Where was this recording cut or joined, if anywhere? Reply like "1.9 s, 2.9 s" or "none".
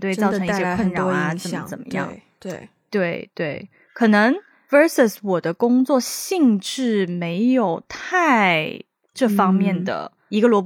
none

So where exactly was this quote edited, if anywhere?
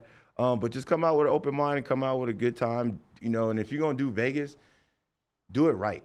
none

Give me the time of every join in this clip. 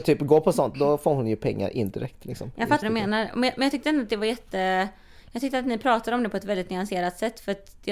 2.8 s

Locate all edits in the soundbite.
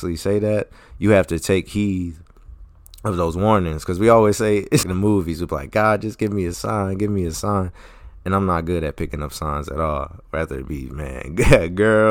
4.8 s

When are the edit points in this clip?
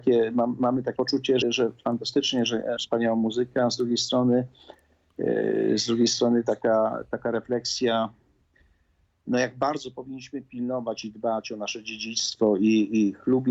1.0 s, 1.4 s, 2.8 s

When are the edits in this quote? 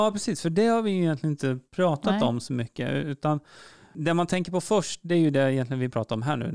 none

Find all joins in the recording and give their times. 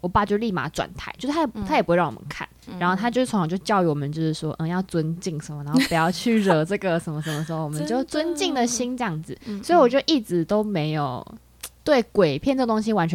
2.7 s, 11.8 s

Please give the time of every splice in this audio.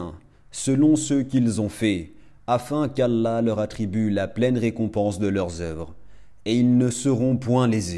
none

